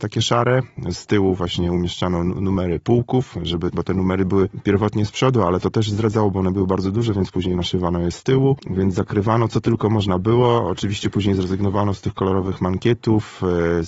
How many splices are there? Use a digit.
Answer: 1